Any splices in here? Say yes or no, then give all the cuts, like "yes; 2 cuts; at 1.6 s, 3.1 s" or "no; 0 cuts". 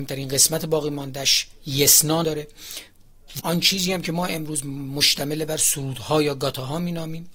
yes; 2 cuts; at 2.2 s, 3.4 s